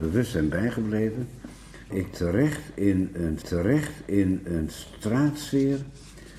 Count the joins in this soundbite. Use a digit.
2